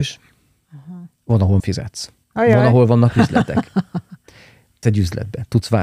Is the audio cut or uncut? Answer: cut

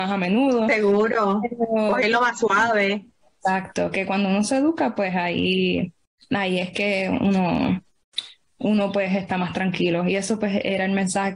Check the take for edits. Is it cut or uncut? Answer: uncut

